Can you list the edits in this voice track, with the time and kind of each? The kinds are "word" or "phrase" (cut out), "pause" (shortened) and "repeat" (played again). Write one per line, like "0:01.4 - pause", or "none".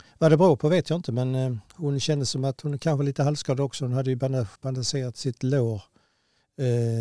0:04.5 - pause

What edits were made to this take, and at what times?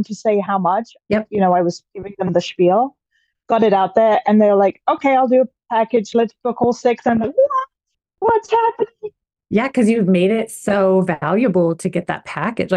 none

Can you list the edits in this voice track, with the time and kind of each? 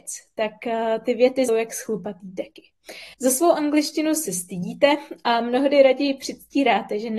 0:01.5 - phrase
0:03.1 - pause

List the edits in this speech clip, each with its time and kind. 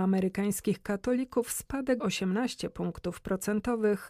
0:02.0 - word

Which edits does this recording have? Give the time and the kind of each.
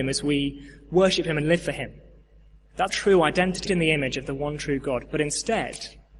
0:02.9 - word
0:03.7 - word

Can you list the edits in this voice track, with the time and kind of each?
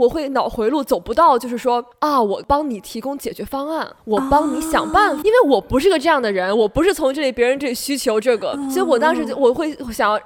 0:05.2 - word

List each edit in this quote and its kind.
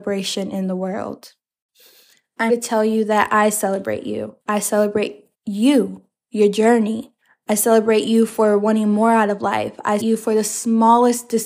0:02.5 - word
0:04.4 - pause
0:05.3 - pause
0:07.2 - pause
0:10.0 - word

